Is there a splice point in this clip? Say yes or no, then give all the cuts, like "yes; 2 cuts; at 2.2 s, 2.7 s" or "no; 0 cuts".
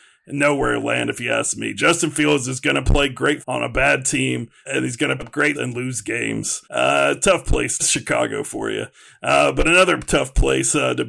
yes; 6 cuts; at 3.4 s, 4.7 s, 5.2 s, 5.5 s, 6.6 s, 7.8 s